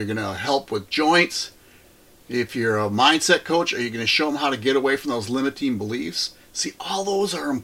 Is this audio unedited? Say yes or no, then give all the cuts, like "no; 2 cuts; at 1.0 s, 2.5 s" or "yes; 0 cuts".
yes; 0 cuts